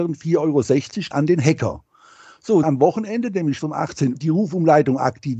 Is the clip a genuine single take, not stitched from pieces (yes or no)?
no